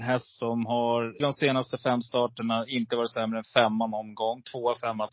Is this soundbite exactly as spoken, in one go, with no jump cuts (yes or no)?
no